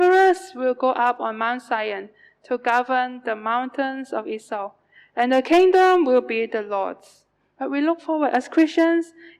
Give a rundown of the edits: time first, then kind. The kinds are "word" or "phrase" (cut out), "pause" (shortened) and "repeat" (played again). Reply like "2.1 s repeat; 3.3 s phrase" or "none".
none